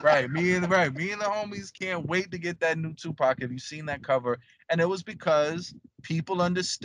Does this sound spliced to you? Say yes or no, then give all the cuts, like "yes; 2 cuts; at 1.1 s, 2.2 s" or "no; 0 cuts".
no; 0 cuts